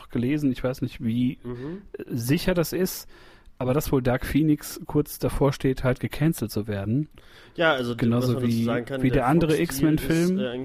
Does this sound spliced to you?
no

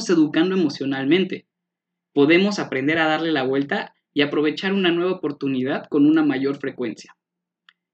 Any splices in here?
no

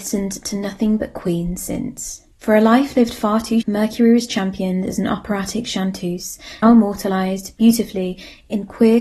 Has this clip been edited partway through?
yes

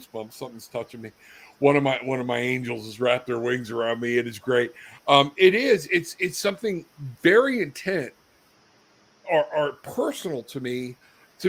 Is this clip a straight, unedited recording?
yes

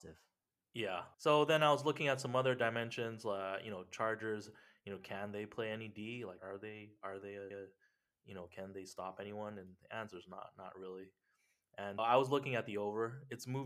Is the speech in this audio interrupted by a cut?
yes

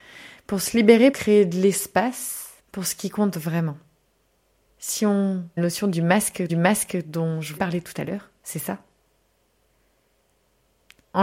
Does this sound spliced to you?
yes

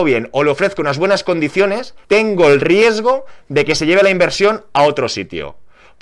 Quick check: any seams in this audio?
yes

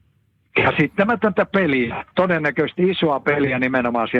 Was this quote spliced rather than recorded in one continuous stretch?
no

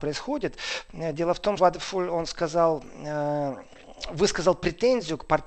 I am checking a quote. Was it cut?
yes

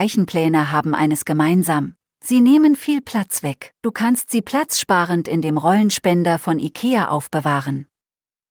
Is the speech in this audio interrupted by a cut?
yes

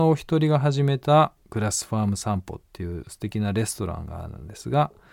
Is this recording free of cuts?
no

